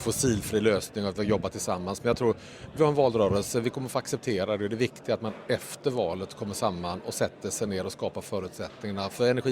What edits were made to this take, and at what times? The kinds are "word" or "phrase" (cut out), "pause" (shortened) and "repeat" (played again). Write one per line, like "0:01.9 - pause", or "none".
none